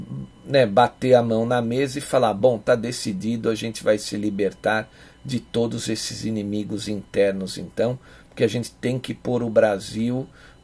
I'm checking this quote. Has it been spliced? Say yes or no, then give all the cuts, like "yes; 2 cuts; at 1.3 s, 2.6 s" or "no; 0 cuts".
no; 0 cuts